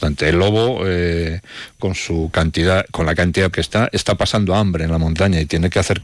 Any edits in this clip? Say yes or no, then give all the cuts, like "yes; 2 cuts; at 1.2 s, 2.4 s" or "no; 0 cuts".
yes; 2 cuts; at 1.8 s, 3.5 s